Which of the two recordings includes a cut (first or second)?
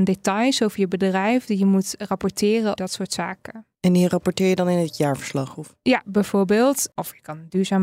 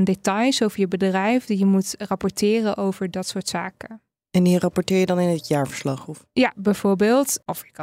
first